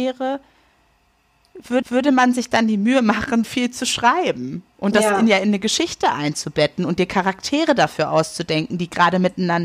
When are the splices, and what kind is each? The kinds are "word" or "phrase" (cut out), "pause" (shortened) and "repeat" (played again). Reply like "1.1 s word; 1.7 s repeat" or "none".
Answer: 1.8 s repeat; 3.4 s word